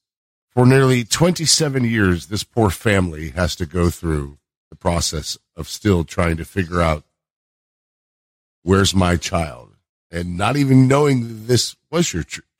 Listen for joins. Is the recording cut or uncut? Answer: uncut